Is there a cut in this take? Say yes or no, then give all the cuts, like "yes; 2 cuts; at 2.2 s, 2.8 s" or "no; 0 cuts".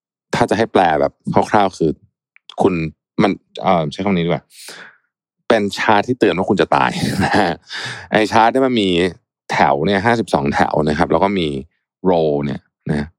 no; 0 cuts